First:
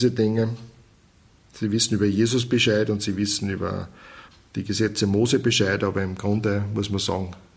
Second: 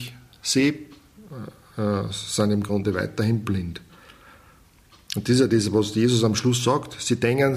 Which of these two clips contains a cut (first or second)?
first